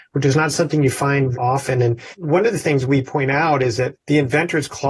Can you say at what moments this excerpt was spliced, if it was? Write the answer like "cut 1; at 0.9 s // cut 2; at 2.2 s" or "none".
cut 1; at 1.3 s